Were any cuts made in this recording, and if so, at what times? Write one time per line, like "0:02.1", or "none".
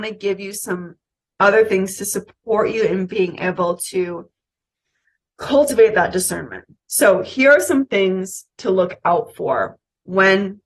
none